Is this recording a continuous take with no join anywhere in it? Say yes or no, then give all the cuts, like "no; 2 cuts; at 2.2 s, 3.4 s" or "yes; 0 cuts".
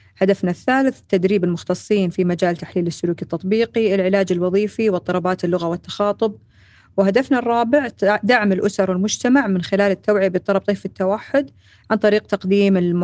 yes; 0 cuts